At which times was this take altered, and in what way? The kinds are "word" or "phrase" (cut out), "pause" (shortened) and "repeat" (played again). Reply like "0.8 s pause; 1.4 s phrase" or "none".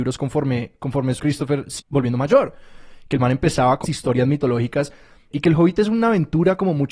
1.2 s word; 1.8 s word; 3.8 s word; 5.3 s word